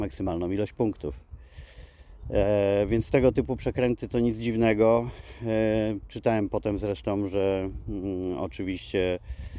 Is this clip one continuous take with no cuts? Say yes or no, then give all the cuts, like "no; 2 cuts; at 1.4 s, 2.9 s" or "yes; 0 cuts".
yes; 0 cuts